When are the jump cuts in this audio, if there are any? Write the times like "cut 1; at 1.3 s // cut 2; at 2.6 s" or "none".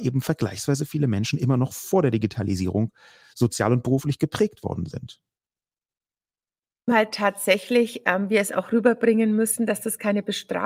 none